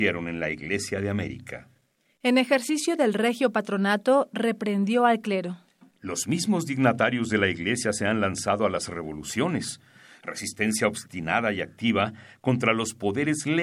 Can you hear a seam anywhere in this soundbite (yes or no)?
no